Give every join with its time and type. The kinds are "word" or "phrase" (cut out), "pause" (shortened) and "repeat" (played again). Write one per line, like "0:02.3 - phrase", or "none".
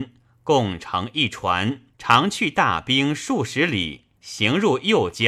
0:01.9 - pause
0:04.2 - pause